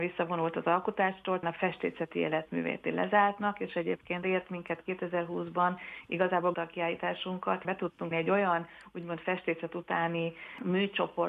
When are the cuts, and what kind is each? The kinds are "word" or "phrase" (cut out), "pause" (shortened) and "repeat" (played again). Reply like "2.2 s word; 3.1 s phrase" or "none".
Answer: 1.4 s word; 2.8 s word; 4.2 s phrase; 6.5 s word; 7.6 s word; 8.1 s word